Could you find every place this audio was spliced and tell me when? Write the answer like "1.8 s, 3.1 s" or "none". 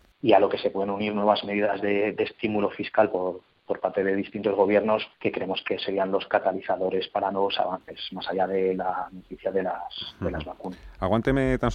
5.1 s